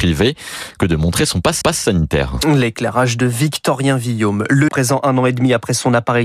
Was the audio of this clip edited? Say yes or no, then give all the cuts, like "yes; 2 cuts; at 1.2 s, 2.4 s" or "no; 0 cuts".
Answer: yes; 2 cuts; at 1.6 s, 4.7 s